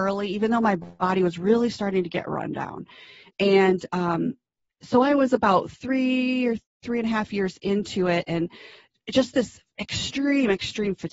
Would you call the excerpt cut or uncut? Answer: uncut